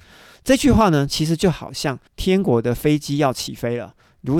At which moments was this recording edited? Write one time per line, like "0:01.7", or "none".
0:02.1